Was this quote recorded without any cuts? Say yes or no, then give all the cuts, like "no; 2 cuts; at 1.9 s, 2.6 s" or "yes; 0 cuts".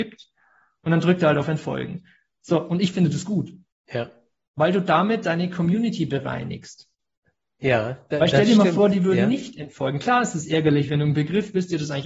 no; 1 cut; at 3.7 s